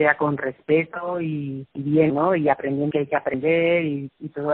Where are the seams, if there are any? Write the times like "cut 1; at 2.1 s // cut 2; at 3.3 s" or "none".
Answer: cut 1; at 1.7 s // cut 2; at 2.1 s // cut 3; at 2.9 s